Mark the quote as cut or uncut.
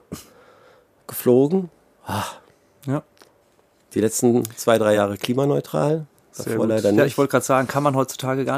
uncut